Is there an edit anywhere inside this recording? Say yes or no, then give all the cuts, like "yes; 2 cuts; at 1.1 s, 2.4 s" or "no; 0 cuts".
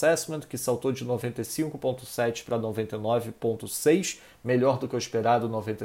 no; 0 cuts